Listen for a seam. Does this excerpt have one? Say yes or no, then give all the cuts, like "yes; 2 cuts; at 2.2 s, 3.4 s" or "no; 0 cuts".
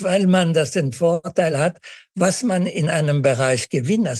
no; 0 cuts